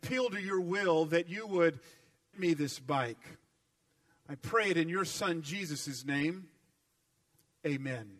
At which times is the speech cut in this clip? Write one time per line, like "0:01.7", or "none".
0:02.3